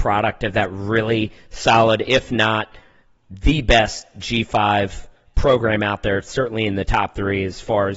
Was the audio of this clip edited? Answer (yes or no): no